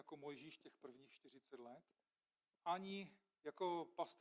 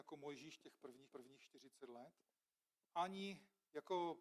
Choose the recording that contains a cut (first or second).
second